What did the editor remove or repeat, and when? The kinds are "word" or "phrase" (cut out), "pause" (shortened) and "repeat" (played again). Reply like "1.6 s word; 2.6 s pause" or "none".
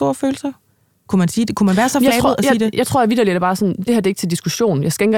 none

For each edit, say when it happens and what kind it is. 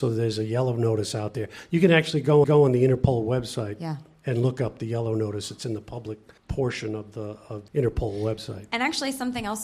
2.4 s repeat; 6.4 s pause; 7.7 s word

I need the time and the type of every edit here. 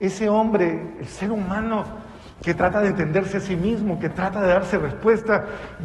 none

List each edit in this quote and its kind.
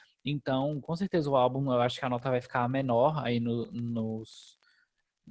none

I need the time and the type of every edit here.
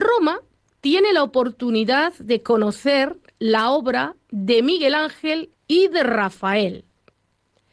5.5 s pause

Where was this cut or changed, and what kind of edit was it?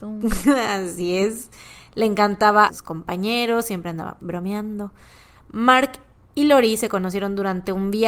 2.7 s phrase; 4.2 s word

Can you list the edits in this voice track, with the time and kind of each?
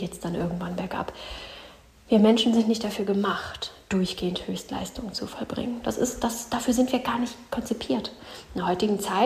none

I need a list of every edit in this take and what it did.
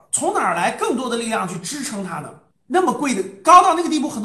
none

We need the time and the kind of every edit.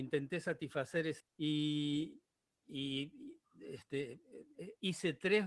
1.2 s phrase

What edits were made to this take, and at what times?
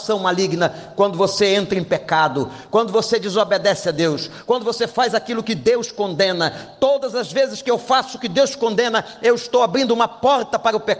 none

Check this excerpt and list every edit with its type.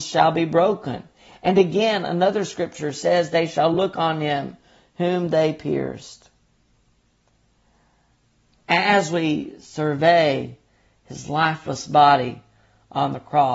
none

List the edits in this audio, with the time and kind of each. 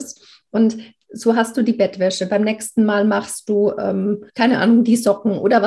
4.3 s pause

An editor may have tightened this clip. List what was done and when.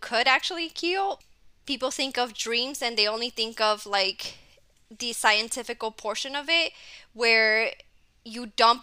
none

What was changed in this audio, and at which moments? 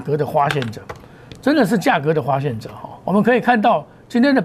3.0 s pause

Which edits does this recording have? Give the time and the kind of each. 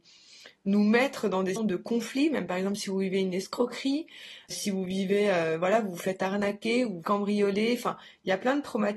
1.6 s word; 4.5 s word; 7.0 s word

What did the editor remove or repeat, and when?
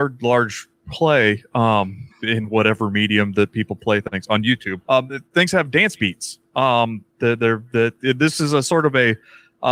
2.1 s pause; 4.8 s pause

